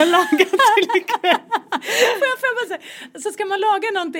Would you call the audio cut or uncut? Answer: cut